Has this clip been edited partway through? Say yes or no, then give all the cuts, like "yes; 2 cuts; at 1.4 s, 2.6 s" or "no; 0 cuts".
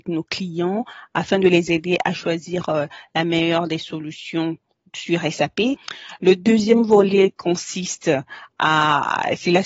no; 0 cuts